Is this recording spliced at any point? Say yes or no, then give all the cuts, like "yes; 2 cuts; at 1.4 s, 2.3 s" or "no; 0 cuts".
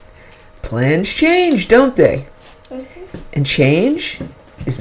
no; 0 cuts